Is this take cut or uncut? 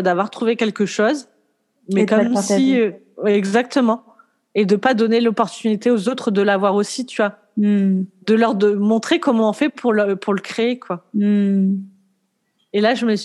uncut